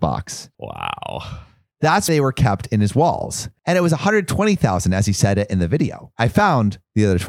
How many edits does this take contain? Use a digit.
1